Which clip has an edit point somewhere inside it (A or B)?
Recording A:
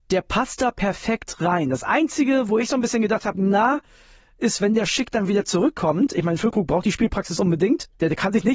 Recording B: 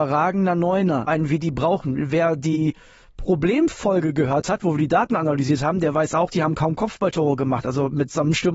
B